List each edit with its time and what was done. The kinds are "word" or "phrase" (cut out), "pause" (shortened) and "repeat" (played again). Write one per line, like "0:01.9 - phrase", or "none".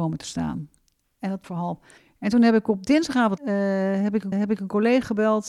0:01.4 - word
0:02.0 - pause
0:03.4 - word
0:04.3 - repeat